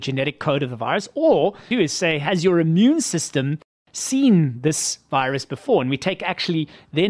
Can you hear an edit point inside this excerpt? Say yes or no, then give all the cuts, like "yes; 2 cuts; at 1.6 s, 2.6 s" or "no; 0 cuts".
yes; 1 cut; at 1.7 s